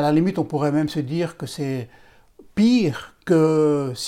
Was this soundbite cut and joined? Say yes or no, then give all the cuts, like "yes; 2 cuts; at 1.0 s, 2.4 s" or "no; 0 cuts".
no; 0 cuts